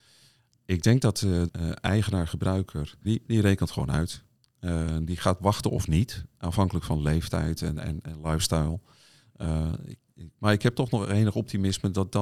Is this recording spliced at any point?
yes; 2 cuts; at 1.5 s, 3.0 s

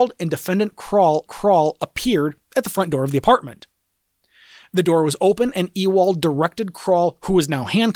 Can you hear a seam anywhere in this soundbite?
yes; 1 cut; at 1.3 s

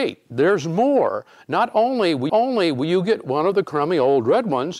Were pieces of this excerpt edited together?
yes; 1 cut; at 2.3 s

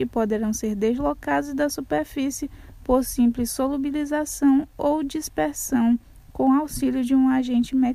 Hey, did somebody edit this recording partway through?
no; 0 cuts

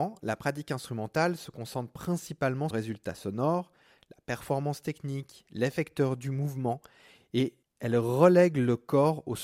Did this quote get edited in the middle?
yes; 2 cuts; at 2.7 s, 7.6 s

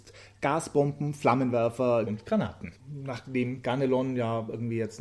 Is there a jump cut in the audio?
yes; 2 cuts; at 2.1 s, 2.8 s

